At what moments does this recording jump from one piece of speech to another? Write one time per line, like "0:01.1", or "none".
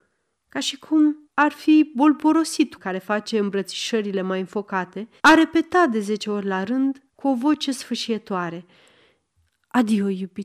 0:01.2
0:02.8
0:05.2
0:07.1